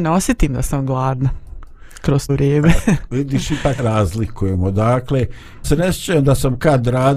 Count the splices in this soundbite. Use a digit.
3